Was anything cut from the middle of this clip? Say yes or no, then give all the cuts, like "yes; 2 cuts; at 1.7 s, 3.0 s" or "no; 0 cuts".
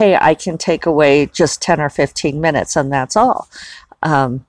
no; 0 cuts